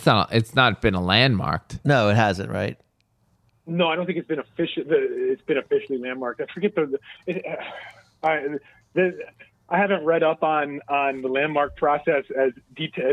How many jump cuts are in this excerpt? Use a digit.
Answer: 0